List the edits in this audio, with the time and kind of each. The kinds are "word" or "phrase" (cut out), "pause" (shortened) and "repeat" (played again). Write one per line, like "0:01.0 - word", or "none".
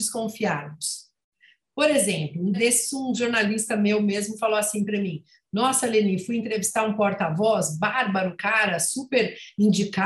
0:02.5 - word